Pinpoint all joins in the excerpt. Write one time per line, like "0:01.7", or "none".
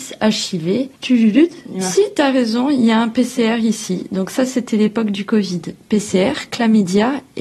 0:00.9